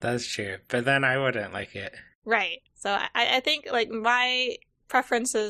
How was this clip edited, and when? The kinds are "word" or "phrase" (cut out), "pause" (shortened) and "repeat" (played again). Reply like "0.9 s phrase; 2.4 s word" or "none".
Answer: 2.7 s pause